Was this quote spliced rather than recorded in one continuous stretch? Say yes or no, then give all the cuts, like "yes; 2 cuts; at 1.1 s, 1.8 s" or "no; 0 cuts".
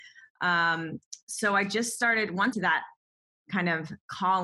yes; 1 cut; at 2.5 s